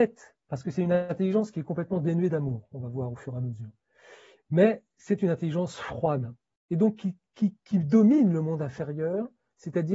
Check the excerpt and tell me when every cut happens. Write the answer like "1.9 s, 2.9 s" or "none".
none